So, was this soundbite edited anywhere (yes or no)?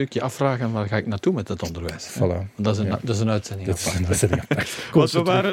no